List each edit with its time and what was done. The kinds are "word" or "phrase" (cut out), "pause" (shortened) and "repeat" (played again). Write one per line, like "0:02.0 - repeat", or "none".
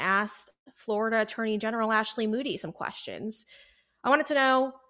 none